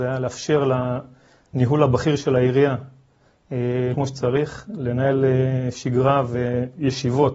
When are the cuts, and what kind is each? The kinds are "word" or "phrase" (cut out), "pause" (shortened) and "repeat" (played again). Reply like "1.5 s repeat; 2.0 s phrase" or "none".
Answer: 3.9 s word